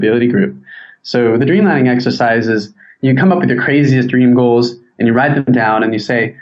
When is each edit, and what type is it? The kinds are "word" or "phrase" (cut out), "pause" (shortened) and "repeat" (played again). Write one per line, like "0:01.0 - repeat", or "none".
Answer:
none